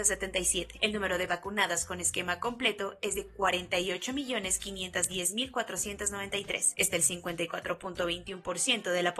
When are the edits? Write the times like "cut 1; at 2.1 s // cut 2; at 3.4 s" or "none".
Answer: cut 1; at 1.3 s // cut 2; at 6.9 s